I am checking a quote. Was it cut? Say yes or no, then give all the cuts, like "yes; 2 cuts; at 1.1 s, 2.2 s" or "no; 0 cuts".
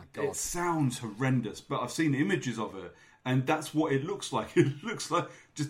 no; 0 cuts